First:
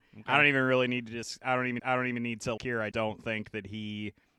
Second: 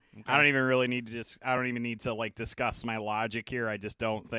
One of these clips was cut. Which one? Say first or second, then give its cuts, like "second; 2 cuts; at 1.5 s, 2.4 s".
first; 3 cuts; at 1.8 s, 2.6 s, 2.9 s